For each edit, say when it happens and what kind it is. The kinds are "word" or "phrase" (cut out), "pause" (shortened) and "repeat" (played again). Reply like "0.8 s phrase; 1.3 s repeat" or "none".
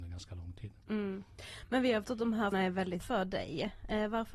2.0 s word; 2.5 s word; 3.0 s word

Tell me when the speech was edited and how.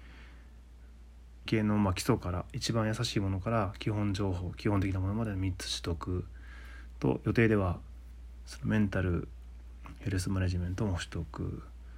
1.5 s word

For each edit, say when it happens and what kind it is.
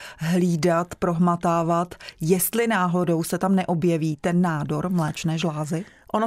none

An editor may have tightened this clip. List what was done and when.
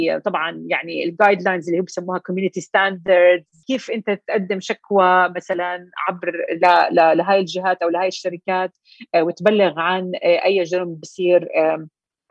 none

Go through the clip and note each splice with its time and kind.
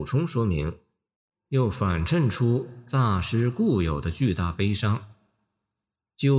none

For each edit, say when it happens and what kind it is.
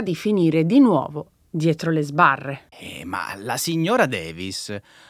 2.7 s pause

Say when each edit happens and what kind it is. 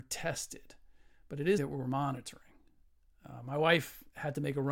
1.6 s word

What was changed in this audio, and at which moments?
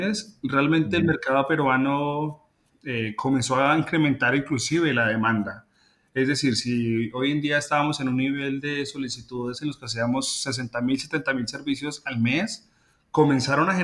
none

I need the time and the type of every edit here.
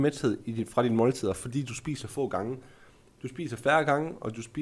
none

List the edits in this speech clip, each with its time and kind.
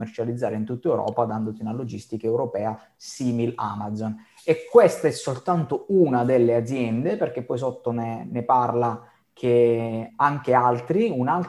none

